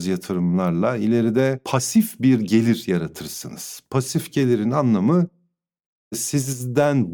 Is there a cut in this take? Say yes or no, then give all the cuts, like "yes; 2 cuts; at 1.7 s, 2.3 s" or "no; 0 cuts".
no; 0 cuts